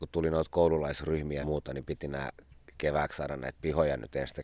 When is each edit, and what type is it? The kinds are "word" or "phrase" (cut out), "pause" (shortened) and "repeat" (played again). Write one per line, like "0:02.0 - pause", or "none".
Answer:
0:01.4 - word